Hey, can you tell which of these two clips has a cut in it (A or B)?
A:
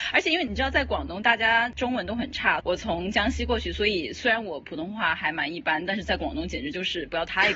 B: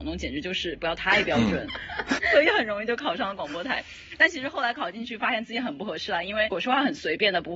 B